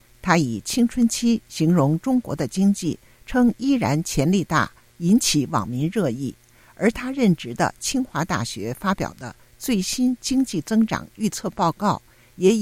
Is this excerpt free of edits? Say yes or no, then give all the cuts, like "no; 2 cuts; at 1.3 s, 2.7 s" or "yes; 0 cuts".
yes; 0 cuts